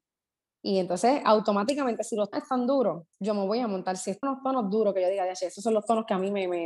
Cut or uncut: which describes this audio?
cut